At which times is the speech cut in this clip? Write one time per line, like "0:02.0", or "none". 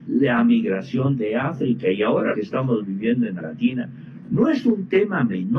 0:02.3
0:03.4